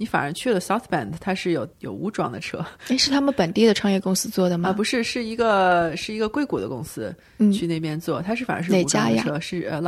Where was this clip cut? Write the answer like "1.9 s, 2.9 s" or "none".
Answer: 1.7 s